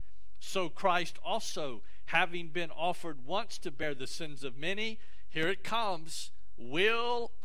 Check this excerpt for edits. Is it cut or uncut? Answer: uncut